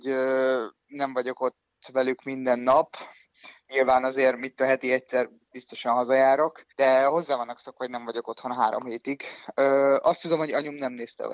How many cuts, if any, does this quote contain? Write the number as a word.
one